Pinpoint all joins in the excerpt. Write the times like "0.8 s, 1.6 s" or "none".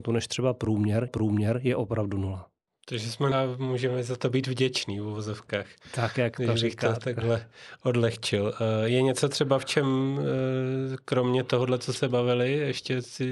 1.1 s, 2.7 s, 3.3 s, 12.0 s